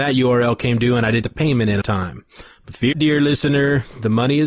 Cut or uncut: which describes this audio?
cut